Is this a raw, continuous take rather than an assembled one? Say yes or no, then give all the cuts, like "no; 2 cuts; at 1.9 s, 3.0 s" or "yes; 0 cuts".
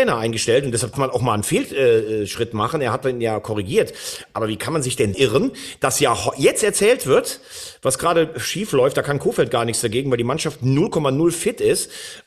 no; 2 cuts; at 0.9 s, 5.1 s